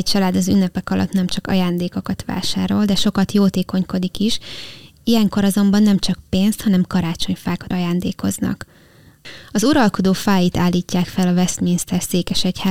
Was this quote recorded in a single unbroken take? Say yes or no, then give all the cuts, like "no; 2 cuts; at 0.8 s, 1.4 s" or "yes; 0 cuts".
no; 1 cut; at 7.7 s